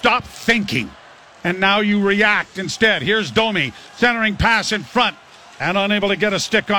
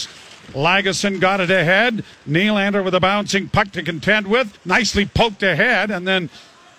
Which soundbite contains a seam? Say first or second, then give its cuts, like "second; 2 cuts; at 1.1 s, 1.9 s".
second; 1 cut; at 4.5 s